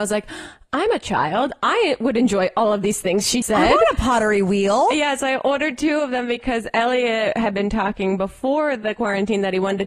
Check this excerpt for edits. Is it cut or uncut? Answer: cut